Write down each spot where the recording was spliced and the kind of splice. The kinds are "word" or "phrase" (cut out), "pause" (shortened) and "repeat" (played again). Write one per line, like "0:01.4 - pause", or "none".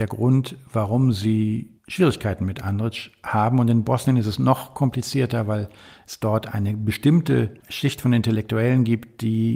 0:01.8 - pause
0:07.6 - pause